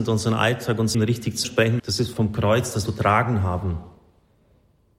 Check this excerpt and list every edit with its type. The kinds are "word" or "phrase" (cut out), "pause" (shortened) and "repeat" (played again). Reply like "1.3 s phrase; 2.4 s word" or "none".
0.9 s word; 1.4 s word; 1.8 s phrase; 2.1 s word; 2.9 s phrase